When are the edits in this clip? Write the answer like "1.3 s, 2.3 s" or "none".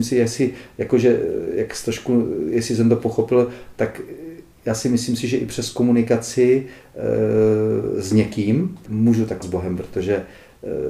8.9 s, 9.4 s